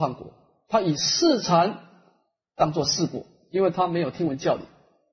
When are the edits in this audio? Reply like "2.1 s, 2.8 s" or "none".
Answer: none

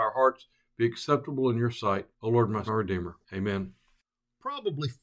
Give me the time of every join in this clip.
2.1 s, 2.7 s, 3.2 s

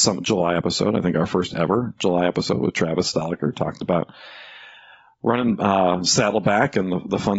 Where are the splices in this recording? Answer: none

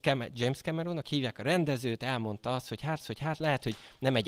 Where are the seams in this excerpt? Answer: 3.0 s

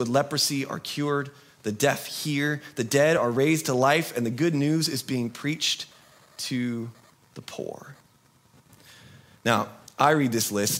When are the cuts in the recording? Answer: none

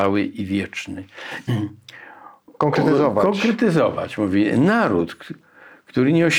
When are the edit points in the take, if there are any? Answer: 1.5 s

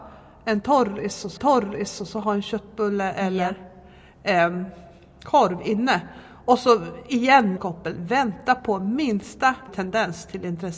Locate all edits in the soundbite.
1.4 s, 7.6 s, 9.7 s

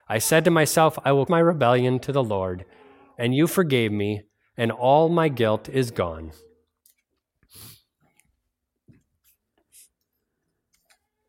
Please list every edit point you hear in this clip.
1.3 s

